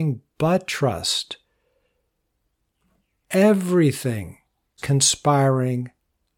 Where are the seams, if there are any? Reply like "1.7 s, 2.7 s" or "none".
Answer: 4.8 s